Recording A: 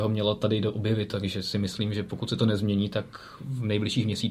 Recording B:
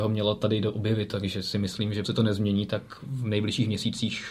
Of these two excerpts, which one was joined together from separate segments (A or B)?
B